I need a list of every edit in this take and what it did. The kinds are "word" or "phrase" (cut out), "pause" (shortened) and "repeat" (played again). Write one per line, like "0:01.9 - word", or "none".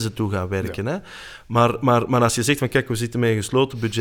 none